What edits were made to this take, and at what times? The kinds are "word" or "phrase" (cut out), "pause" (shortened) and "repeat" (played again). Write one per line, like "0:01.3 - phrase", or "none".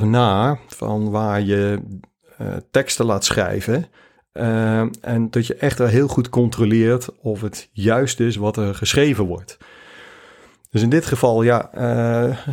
none